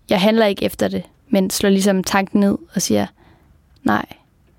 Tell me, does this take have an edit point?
no; 0 cuts

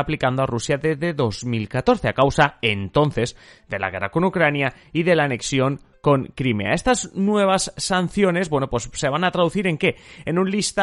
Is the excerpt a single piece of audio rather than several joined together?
yes; 0 cuts

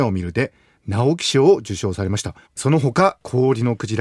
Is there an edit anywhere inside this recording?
yes; 1 cut; at 2.4 s

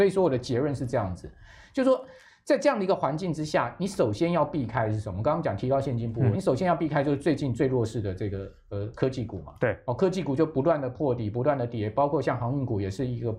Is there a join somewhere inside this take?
yes; 1 cut; at 6.3 s

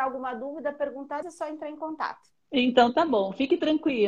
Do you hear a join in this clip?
yes; 1 cut; at 1.2 s

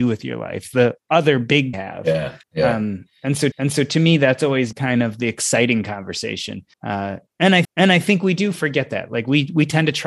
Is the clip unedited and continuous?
no; 6 cuts; at 1.7 s, 2.4 s, 3.5 s, 4.7 s, 6.7 s, 7.6 s

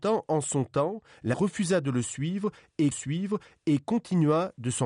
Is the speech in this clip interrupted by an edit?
yes; 2 cuts; at 1.3 s, 2.9 s

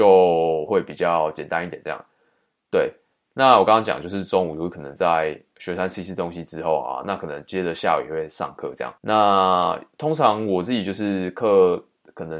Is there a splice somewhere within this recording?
yes; 1 cut; at 9.0 s

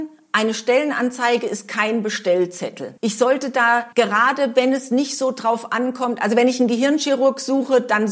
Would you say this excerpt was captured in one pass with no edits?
no; 2 cuts; at 3.0 s, 3.9 s

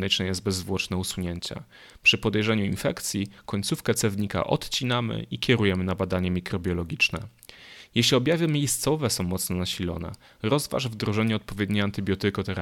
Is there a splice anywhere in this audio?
no; 0 cuts

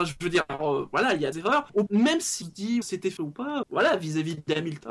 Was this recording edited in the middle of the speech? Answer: yes; 6 cuts; at 1.3 s, 1.9 s, 2.4 s, 2.8 s, 3.2 s, 3.6 s

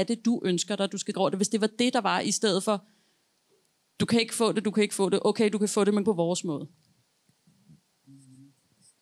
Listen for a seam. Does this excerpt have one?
yes; 2 cuts; at 1.1 s, 6.0 s

